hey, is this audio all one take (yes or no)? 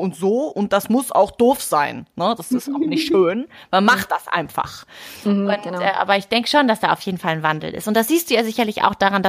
yes